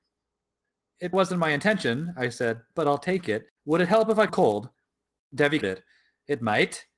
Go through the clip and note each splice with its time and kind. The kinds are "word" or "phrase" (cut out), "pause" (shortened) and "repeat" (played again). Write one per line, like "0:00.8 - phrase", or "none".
0:01.1 - word
0:03.6 - pause
0:04.3 - phrase
0:05.6 - word